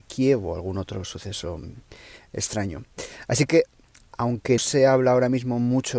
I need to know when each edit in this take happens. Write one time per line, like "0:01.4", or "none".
0:04.6